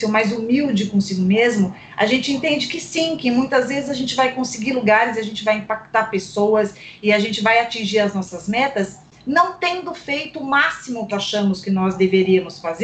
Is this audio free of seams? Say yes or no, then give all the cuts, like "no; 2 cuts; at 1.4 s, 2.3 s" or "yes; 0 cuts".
no; 1 cut; at 11.1 s